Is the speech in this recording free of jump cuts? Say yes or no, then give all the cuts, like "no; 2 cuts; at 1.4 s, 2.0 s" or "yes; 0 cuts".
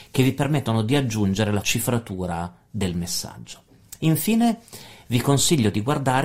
no; 1 cut; at 1.6 s